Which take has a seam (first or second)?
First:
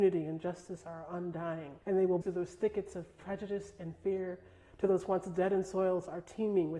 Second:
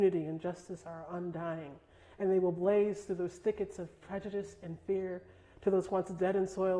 first